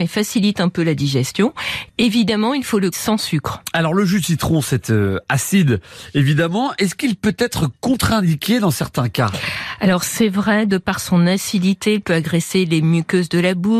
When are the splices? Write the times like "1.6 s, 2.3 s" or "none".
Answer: 2.9 s